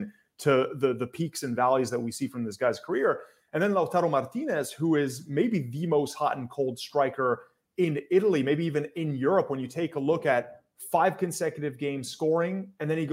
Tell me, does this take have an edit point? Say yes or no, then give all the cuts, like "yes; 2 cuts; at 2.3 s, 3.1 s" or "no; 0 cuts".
no; 0 cuts